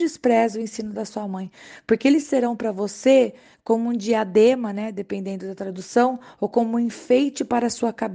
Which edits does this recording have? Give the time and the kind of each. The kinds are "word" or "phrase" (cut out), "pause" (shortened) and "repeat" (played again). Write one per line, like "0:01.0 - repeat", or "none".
none